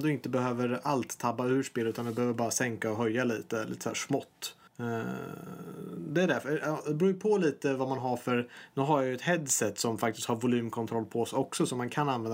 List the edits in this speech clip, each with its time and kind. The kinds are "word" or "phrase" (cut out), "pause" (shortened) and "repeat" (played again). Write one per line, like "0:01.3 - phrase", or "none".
0:04.7 - pause